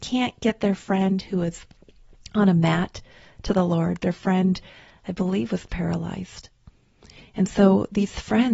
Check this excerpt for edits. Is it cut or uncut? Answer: uncut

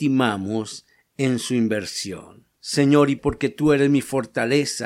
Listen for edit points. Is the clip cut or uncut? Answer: cut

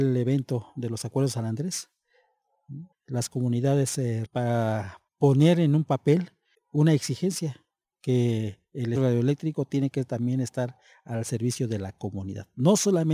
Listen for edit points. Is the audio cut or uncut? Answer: cut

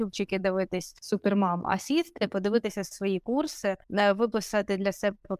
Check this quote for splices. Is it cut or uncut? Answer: cut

